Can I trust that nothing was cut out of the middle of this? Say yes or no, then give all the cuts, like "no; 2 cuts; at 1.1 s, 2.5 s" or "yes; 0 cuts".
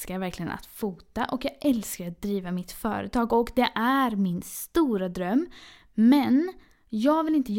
yes; 0 cuts